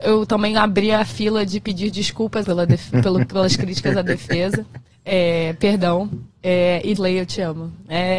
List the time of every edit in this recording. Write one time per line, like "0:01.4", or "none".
0:02.4
0:04.9
0:06.3
0:07.0